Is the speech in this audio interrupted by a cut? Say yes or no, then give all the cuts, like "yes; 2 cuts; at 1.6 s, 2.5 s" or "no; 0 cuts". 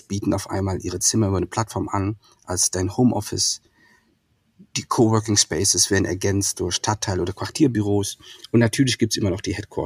no; 0 cuts